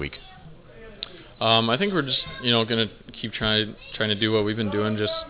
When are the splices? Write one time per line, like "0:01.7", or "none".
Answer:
none